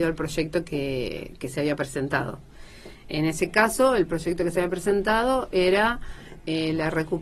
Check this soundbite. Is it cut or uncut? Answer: uncut